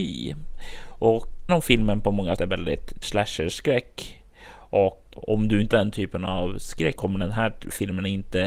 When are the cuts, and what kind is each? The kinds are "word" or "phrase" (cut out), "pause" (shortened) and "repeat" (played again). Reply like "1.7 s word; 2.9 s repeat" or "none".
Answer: 1.5 s word; 2.4 s word; 3.0 s word; 5.1 s word; 5.7 s word; 7.0 s word